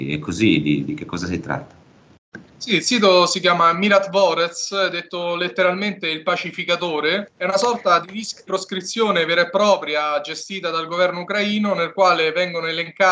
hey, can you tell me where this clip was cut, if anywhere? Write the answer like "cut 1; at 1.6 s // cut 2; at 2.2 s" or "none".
cut 1; at 2.5 s // cut 2; at 7.4 s // cut 3; at 8.5 s